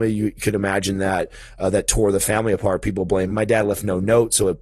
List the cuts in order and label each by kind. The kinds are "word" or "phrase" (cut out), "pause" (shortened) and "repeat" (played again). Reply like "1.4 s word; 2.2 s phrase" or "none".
3.3 s word